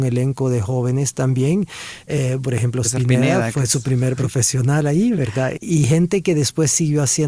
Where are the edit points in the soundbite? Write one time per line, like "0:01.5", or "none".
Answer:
0:02.4
0:02.8
0:04.2